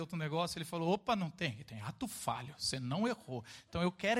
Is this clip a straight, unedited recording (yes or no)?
yes